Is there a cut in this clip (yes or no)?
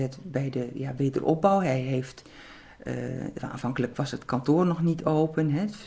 no